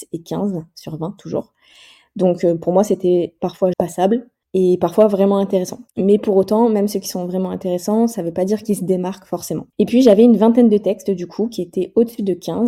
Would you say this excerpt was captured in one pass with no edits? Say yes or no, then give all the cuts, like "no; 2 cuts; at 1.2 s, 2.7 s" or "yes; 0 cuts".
no; 4 cuts; at 3.7 s, 4.4 s, 5.9 s, 9.7 s